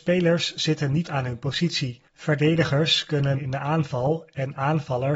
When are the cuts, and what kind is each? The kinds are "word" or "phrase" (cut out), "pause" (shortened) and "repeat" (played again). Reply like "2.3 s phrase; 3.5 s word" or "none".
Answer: 1.0 s word; 2.1 s pause; 3.4 s word